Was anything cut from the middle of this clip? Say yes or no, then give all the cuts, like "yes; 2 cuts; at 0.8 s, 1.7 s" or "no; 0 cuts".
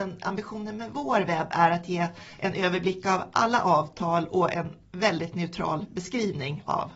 yes; 1 cut; at 2.3 s